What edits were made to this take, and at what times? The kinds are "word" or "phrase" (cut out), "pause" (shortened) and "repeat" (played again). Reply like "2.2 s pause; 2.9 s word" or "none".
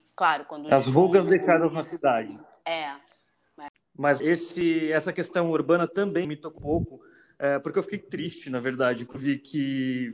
4.2 s word; 6.2 s word; 6.6 s word; 9.2 s word